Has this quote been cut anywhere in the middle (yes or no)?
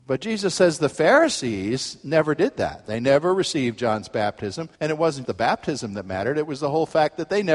yes